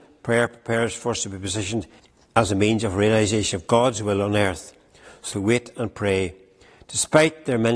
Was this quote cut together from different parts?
yes; 2 cuts; at 2.0 s, 5.3 s

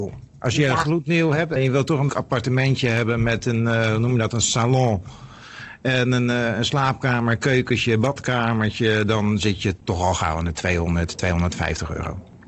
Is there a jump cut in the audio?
yes; 2 cuts; at 1.6 s, 2.1 s

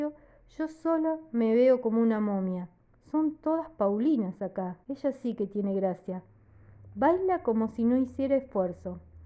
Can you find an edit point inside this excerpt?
yes; 2 cuts; at 2.9 s, 4.8 s

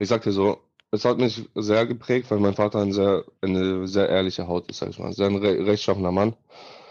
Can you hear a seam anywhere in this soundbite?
no; 0 cuts

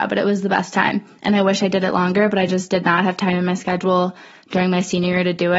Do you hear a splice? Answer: no; 0 cuts

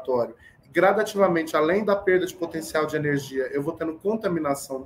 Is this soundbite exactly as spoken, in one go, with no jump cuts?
yes; 0 cuts

